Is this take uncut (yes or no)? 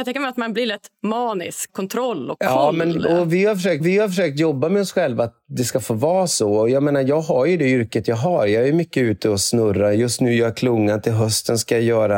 no